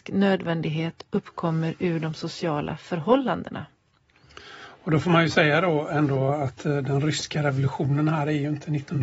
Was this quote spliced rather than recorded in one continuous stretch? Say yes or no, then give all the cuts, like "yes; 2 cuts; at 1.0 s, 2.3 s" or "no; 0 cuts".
no; 0 cuts